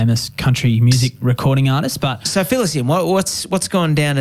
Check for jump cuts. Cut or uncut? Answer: uncut